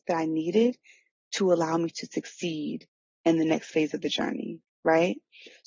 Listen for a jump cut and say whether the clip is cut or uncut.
uncut